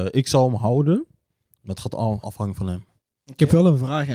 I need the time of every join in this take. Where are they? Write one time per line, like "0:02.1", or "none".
0:02.2